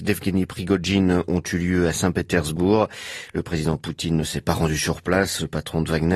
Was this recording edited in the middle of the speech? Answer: no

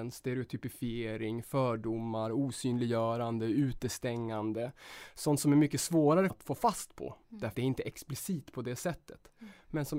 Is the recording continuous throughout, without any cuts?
no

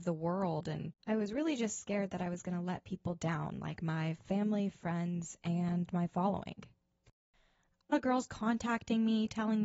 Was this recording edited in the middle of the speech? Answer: yes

